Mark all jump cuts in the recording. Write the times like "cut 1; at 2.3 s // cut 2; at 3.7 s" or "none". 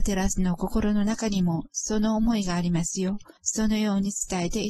cut 1; at 3.4 s